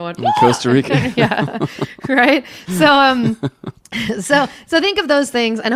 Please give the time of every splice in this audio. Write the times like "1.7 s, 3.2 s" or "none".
none

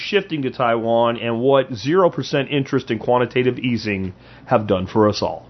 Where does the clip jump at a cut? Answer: none

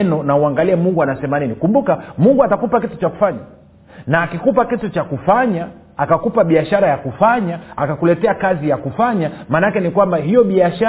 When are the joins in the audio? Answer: none

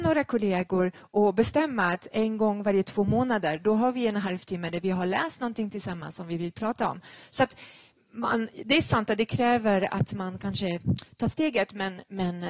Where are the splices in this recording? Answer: none

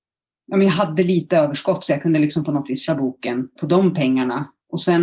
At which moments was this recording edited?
2.9 s, 3.6 s

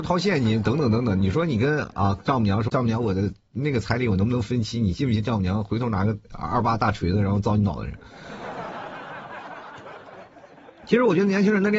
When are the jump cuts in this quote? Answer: 2.7 s, 6.2 s

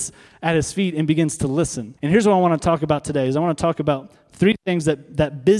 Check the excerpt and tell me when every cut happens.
2.0 s

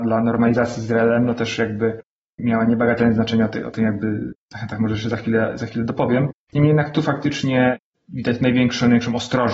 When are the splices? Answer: none

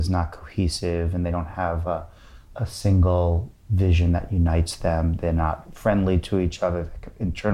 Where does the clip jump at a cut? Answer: none

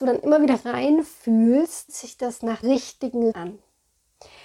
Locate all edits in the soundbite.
1.9 s, 2.6 s, 3.3 s

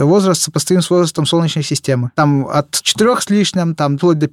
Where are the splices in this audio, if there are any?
none

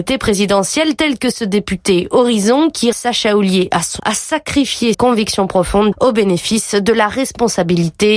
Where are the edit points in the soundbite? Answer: 2.9 s, 4.0 s, 4.9 s, 5.9 s

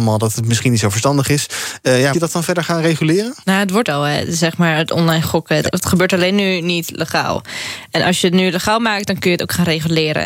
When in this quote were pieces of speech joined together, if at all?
2.1 s, 3.4 s, 3.8 s, 5.7 s

